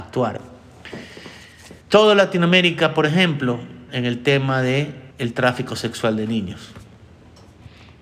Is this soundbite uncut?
no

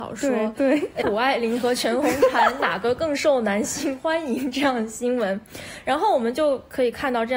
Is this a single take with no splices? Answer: no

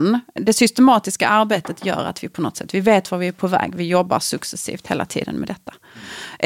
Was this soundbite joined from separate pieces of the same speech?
no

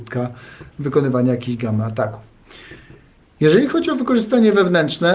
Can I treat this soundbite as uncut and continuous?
yes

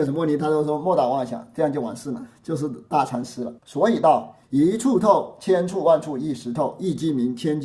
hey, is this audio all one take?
no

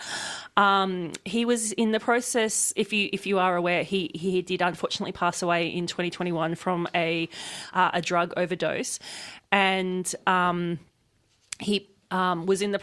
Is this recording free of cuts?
yes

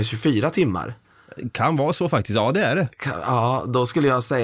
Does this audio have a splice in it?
no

